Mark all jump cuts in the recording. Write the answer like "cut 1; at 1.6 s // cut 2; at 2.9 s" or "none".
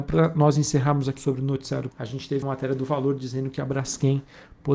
cut 1; at 1.2 s // cut 2; at 1.9 s // cut 3; at 2.4 s